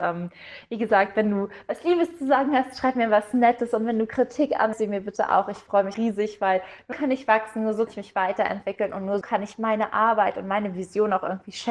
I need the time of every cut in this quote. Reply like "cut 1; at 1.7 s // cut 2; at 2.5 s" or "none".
cut 1; at 4.7 s // cut 2; at 5.9 s // cut 3; at 6.9 s // cut 4; at 7.9 s // cut 5; at 9.2 s